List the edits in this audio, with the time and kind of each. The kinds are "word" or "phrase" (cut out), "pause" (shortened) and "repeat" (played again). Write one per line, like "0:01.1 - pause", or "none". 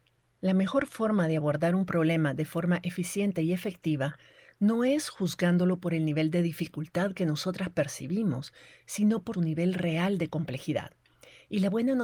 0:09.3 - word